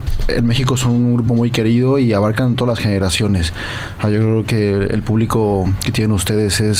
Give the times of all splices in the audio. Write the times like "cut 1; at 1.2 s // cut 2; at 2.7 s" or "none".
none